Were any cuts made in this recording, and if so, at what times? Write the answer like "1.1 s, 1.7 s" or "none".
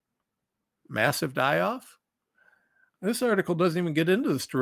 none

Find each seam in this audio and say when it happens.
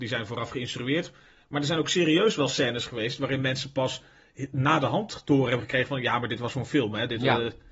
none

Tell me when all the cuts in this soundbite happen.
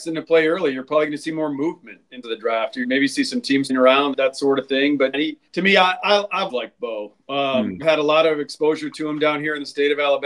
2.2 s, 2.8 s, 3.7 s, 4.1 s, 5.1 s, 5.5 s, 6.5 s, 7.8 s

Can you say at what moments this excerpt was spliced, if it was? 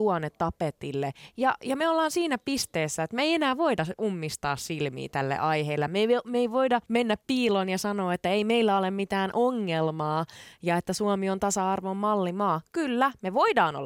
none

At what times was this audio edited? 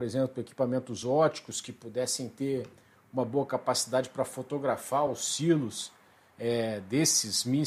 none

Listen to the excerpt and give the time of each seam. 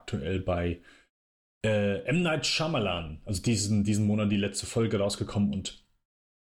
none

